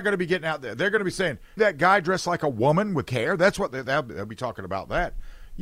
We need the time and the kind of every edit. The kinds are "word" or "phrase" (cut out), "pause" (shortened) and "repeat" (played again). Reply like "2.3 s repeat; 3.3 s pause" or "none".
1.6 s phrase; 3.1 s word